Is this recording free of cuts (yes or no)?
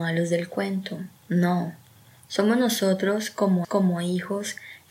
no